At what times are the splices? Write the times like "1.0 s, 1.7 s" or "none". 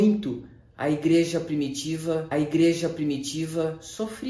2.3 s